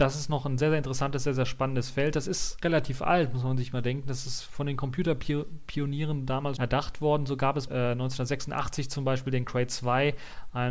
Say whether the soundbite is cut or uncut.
cut